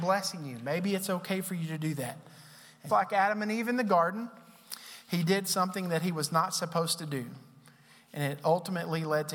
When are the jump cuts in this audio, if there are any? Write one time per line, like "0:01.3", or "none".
0:02.9